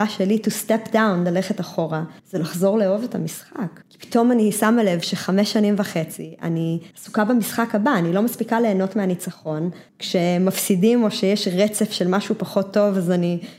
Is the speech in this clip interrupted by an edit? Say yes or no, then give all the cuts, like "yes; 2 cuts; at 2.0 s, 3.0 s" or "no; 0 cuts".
yes; 4 cuts; at 2.2 s, 3.8 s, 6.9 s, 9.9 s